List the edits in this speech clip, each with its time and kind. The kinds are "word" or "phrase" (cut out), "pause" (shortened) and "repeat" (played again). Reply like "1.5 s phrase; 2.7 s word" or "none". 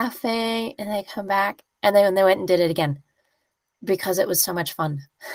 none